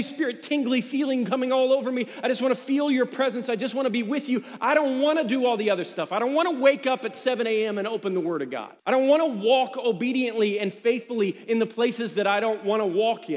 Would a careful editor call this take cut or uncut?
cut